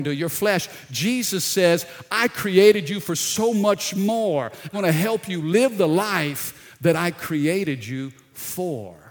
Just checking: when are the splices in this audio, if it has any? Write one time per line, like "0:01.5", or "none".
0:04.7